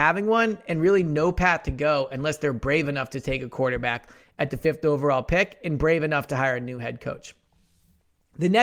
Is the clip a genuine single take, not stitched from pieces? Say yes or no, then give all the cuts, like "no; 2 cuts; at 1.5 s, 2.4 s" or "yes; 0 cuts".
yes; 0 cuts